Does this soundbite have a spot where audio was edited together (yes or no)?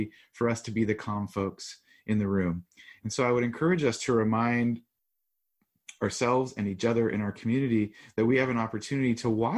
no